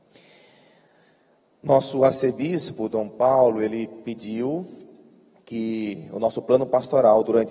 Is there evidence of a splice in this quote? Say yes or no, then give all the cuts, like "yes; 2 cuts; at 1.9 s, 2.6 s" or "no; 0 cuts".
no; 0 cuts